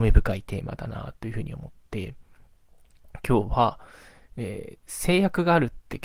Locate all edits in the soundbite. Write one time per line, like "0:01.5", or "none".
none